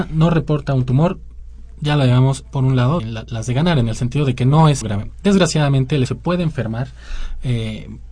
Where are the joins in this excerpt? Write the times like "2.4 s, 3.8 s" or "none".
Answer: 3.0 s, 4.8 s, 6.1 s